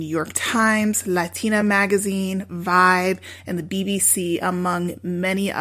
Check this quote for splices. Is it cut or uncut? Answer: uncut